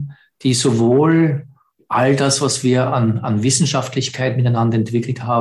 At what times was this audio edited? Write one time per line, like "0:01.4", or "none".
none

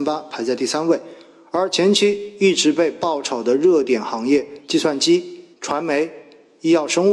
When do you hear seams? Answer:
0:04.6
0:05.5

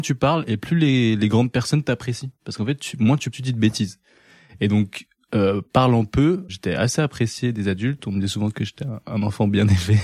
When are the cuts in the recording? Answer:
0:03.3
0:06.5

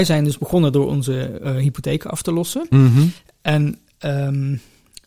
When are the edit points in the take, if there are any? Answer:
none

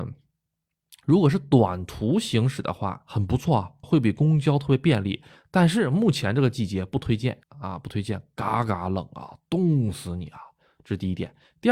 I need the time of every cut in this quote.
0:03.8
0:07.4

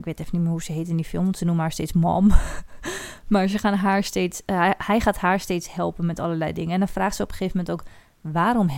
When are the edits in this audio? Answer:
none

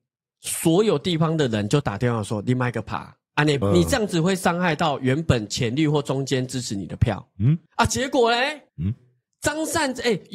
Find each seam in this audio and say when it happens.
0:03.6
0:07.7
0:08.7

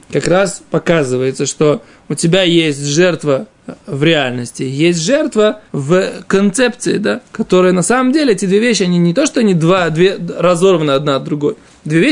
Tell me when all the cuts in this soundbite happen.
0:05.7

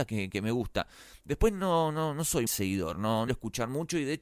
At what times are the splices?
0:02.5
0:03.3

